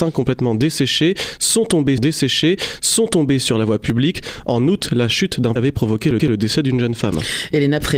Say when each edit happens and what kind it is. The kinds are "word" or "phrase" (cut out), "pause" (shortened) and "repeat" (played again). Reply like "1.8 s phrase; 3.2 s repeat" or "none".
2.0 s repeat; 5.6 s word; 6.2 s repeat